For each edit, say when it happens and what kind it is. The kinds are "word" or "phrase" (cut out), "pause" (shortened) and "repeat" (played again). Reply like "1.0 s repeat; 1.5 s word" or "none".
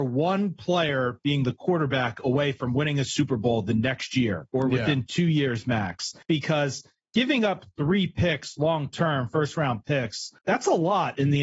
6.2 s pause; 10.4 s pause